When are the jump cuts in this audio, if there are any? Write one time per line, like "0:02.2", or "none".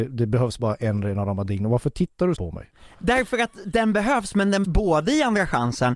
0:02.4
0:04.6